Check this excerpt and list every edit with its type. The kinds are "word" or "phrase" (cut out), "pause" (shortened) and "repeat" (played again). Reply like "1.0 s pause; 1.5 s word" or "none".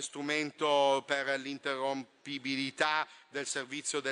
none